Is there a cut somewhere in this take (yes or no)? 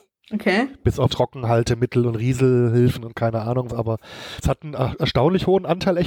yes